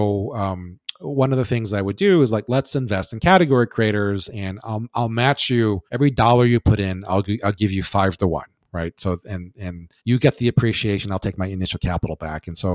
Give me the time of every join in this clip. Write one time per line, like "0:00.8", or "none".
0:05.9
0:10.0